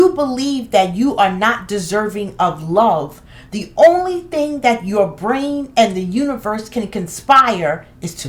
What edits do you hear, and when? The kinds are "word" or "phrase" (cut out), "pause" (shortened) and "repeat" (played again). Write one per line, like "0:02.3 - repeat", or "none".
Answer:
none